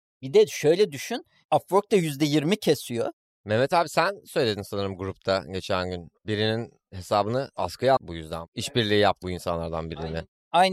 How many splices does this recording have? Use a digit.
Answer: 2